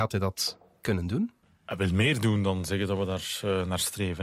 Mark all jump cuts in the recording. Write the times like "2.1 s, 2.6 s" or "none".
1.4 s